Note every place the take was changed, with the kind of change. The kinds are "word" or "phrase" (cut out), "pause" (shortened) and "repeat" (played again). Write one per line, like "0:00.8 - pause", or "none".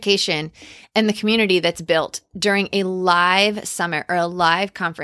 none

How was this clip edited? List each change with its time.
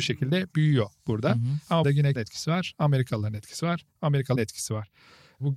0:01.8 - word
0:02.2 - word
0:04.4 - word

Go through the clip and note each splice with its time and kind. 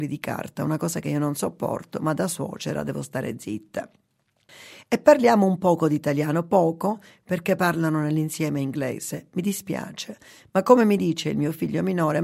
none

